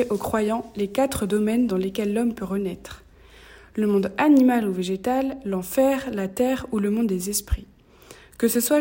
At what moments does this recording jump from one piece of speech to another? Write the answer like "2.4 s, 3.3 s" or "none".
none